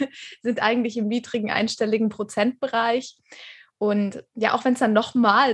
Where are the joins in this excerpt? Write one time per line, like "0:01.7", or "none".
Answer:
none